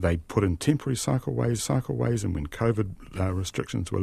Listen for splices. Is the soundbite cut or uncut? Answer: cut